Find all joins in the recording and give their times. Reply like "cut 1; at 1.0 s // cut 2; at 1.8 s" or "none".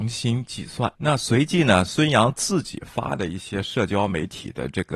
cut 1; at 0.9 s